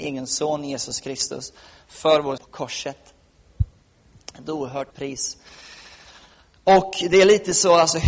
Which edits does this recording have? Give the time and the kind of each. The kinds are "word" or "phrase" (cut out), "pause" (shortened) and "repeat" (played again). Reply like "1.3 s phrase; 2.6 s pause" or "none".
2.4 s word; 4.9 s word